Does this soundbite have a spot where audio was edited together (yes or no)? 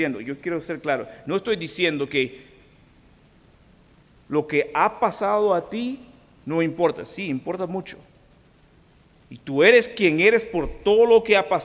no